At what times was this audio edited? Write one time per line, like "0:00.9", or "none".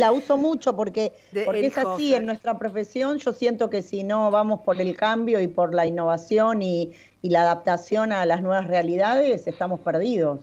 none